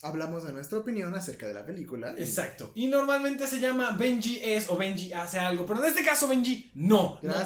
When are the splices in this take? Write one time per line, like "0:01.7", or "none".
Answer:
none